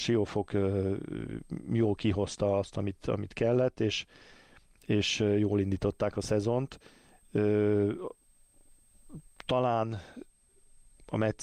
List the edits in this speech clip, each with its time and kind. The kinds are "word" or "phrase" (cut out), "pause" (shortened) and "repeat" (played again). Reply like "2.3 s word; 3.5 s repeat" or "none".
none